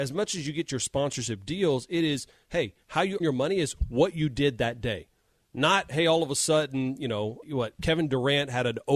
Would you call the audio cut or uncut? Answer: cut